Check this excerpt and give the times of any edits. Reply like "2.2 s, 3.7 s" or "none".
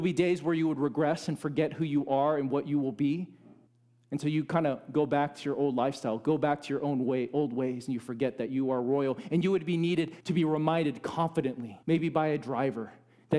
3.7 s, 10.2 s, 11.8 s